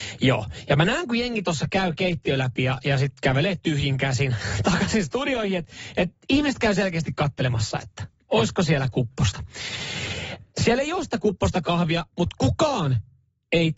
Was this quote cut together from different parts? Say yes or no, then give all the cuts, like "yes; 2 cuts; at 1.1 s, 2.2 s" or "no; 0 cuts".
yes; 1 cut; at 10.5 s